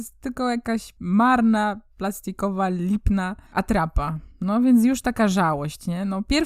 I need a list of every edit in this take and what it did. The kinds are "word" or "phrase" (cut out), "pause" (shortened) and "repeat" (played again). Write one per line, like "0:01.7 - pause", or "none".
0:03.5 - pause